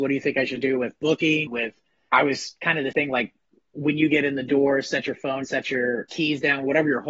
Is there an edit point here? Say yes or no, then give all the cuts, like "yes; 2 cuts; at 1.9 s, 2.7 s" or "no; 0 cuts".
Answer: yes; 5 cuts; at 1.5 s, 2.1 s, 2.9 s, 5.4 s, 6.1 s